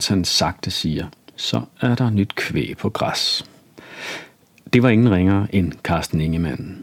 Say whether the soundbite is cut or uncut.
uncut